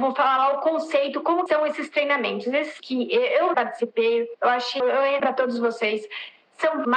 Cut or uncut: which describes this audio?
cut